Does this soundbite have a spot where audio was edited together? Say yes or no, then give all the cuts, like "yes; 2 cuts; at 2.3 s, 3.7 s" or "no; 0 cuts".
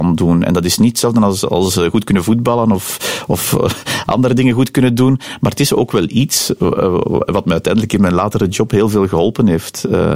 no; 0 cuts